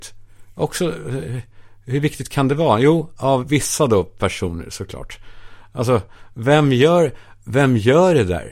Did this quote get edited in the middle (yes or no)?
yes